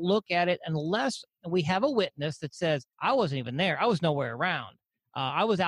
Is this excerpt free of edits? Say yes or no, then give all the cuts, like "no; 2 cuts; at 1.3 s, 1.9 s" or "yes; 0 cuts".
no; 1 cut; at 2.9 s